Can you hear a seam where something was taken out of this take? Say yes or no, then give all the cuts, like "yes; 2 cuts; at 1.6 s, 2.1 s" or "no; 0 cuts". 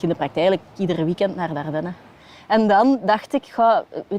no; 0 cuts